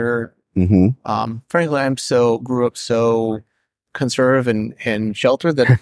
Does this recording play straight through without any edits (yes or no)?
yes